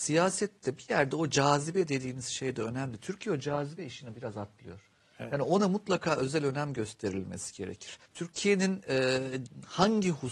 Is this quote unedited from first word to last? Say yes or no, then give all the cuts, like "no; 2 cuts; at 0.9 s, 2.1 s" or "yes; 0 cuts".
no; 1 cut; at 8.1 s